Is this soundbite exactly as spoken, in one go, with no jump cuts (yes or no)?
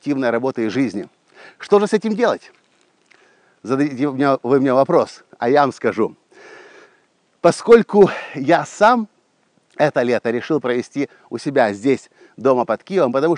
yes